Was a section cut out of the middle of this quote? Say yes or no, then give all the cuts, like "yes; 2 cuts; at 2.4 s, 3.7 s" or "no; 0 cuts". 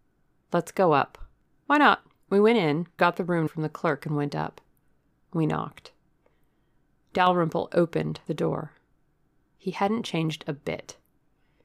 yes; 2 cuts; at 3.0 s, 3.5 s